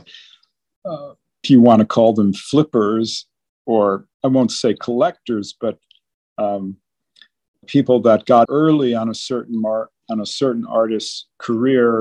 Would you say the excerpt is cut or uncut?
cut